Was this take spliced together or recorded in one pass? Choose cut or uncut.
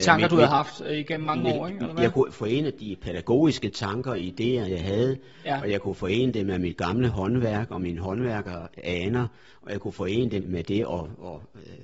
cut